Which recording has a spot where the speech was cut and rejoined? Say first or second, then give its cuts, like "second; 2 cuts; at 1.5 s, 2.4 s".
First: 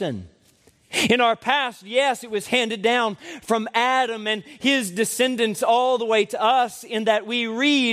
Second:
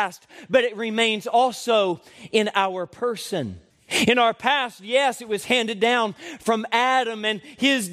second; 1 cut; at 3.7 s